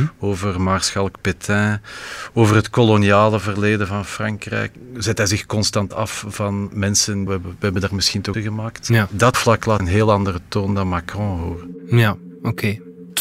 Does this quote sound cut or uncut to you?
cut